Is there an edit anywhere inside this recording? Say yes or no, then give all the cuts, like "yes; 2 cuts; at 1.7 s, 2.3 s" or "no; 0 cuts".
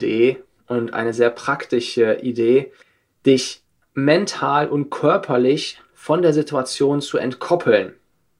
yes; 1 cut; at 2.8 s